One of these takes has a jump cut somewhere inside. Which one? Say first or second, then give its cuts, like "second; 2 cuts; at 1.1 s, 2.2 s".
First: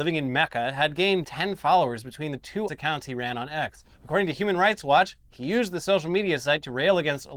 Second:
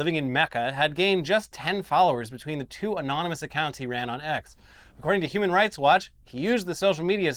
first; 3 cuts; at 1.2 s, 2.7 s, 3.9 s